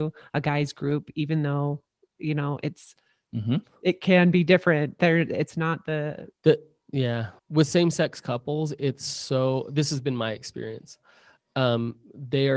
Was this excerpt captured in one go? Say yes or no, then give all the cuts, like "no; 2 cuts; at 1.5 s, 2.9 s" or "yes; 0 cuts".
no; 1 cut; at 7.4 s